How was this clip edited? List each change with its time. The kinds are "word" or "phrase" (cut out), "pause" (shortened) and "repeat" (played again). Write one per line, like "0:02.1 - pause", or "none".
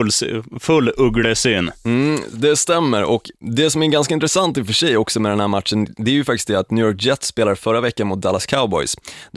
none